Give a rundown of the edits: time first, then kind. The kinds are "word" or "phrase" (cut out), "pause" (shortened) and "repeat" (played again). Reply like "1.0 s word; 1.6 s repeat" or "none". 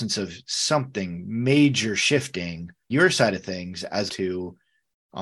2.9 s word; 4.1 s word